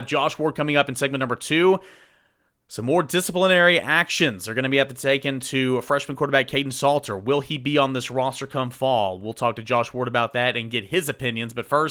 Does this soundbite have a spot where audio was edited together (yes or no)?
no